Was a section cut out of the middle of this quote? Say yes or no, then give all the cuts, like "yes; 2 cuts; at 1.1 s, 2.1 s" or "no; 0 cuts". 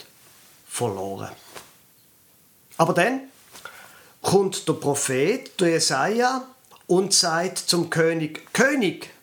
yes; 1 cut; at 6.7 s